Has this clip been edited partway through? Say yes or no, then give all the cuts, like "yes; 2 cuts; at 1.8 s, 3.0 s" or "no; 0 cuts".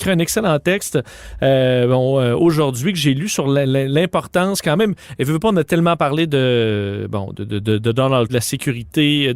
yes; 1 cut; at 8.3 s